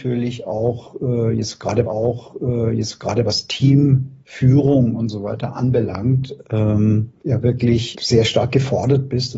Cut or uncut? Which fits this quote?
cut